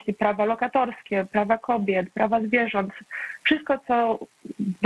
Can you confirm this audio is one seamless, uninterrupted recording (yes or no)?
yes